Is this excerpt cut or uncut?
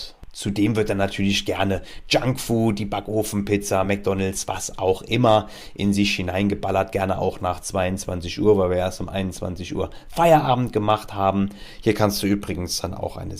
uncut